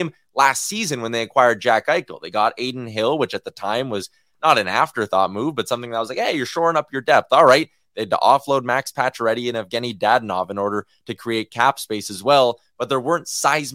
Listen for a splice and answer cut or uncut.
uncut